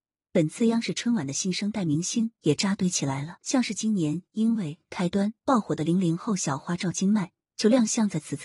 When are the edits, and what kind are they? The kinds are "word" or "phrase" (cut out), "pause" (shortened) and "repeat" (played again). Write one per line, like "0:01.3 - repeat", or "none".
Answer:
0:03.4 - pause